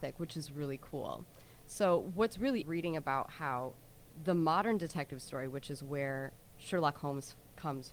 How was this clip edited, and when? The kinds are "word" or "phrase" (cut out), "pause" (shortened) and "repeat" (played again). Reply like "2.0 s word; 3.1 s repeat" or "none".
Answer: 2.6 s phrase